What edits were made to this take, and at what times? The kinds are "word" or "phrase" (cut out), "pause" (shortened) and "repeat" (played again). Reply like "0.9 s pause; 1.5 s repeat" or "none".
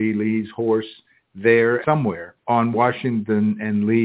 1.8 s phrase; 2.4 s pause